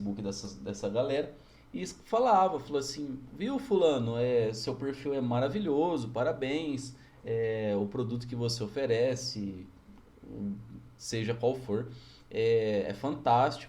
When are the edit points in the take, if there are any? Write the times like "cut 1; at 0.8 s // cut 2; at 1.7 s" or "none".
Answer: none